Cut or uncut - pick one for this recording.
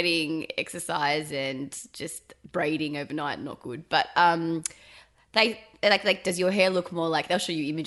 uncut